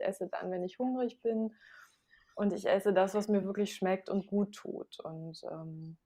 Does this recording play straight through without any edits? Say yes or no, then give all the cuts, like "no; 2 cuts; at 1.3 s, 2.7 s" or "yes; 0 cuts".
yes; 0 cuts